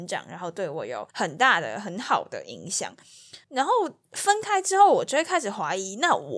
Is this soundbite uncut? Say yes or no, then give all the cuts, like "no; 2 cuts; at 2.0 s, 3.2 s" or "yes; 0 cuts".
no; 2 cuts; at 1.1 s, 3.4 s